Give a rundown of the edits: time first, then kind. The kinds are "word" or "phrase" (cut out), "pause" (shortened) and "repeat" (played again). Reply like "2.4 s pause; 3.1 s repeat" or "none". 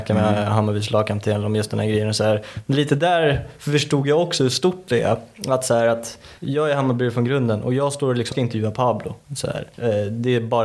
6.4 s pause; 8.3 s word; 9.2 s pause